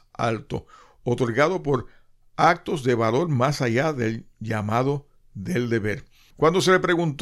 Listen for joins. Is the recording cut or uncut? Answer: uncut